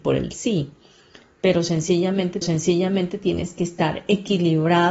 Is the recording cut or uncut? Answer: cut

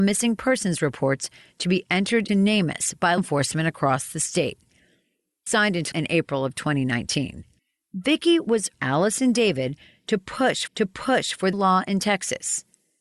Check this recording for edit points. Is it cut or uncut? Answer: cut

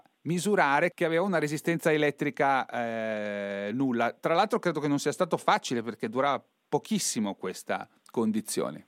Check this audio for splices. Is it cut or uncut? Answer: uncut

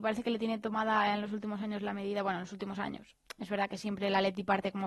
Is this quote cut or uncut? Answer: uncut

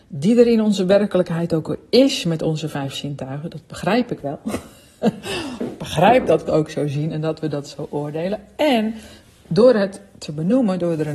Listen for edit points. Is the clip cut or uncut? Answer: cut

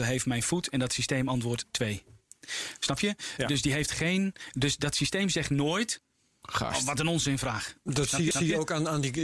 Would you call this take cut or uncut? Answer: cut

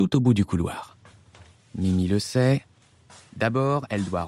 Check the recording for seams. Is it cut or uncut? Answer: uncut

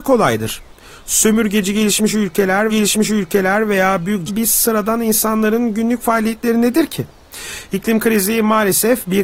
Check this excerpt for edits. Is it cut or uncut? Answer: cut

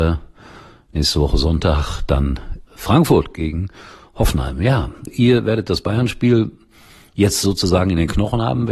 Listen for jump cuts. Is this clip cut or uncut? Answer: cut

